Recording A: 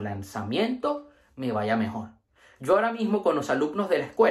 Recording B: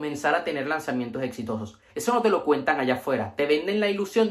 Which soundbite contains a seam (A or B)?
B